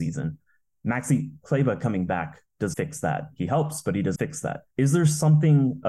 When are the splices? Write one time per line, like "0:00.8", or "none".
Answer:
0:02.7
0:04.2
0:04.7